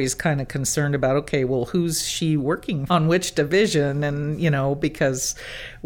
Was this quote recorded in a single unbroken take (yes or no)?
no